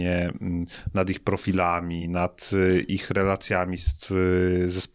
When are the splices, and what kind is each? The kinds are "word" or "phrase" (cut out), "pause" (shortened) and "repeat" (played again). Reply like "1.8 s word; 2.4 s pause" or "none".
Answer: none